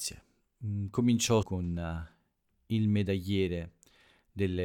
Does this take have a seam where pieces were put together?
yes; 1 cut; at 1.4 s

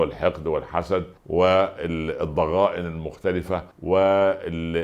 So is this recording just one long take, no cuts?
no; 2 cuts; at 1.2 s, 3.7 s

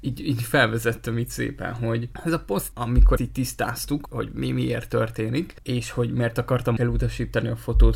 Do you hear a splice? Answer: yes; 4 cuts; at 2.7 s, 3.2 s, 4.1 s, 6.8 s

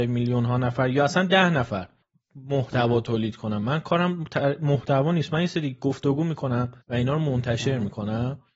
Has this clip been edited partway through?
yes; 2 cuts; at 2.0 s, 6.8 s

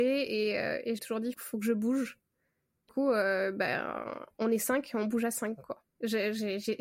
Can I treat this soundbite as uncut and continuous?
no; 4 cuts; at 1.0 s, 1.3 s, 2.9 s, 5.9 s

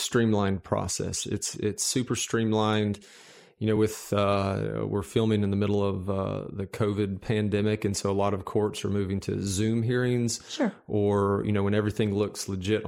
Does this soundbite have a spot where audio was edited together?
no; 0 cuts

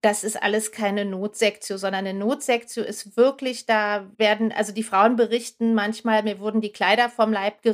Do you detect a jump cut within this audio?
yes; 1 cut; at 4.1 s

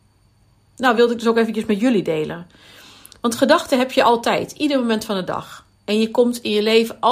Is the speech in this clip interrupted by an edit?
no; 0 cuts

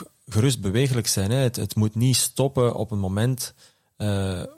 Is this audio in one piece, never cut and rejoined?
yes; 0 cuts

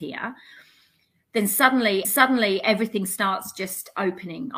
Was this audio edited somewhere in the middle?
yes; 1 cut; at 2.0 s

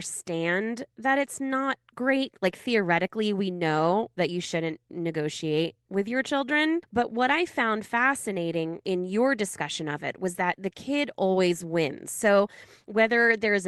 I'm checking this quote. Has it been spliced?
no; 0 cuts

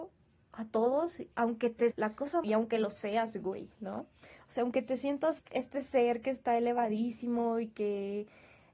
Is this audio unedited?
no; 4 cuts; at 1.3 s, 1.9 s, 2.4 s, 5.4 s

